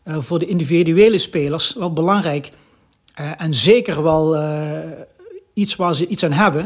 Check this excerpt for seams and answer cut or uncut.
uncut